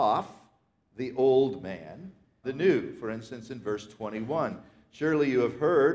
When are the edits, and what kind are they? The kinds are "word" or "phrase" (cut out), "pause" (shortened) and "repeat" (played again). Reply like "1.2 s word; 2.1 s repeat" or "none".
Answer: 2.4 s phrase

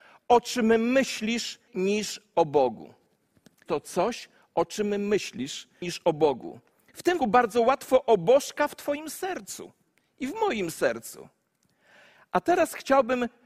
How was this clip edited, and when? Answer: 1.7 s word; 3.7 s word; 5.8 s word; 7.2 s word

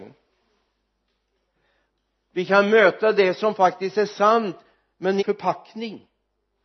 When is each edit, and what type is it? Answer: 5.2 s phrase

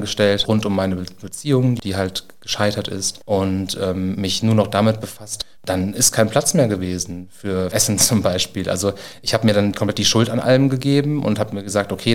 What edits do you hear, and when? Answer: 5.5 s pause

